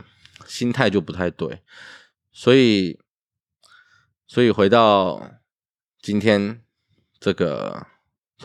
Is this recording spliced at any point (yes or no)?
no